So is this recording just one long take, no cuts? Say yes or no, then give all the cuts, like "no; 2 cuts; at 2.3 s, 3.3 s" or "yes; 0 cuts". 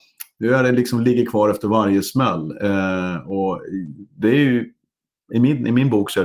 no; 1 cut; at 4.1 s